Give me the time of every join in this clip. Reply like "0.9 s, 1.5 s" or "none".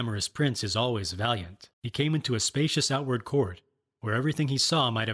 1.7 s